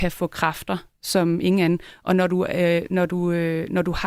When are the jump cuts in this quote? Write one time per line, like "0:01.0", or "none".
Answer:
none